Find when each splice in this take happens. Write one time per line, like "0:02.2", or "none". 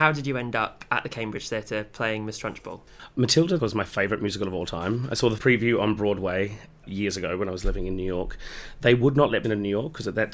0:03.6
0:05.4
0:09.4